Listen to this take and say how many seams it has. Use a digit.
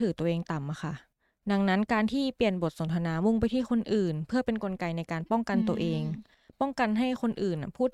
0